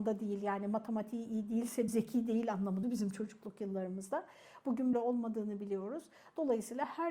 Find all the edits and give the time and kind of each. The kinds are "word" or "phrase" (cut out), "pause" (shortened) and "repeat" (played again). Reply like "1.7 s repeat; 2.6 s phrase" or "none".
1.9 s word; 2.8 s word; 4.9 s word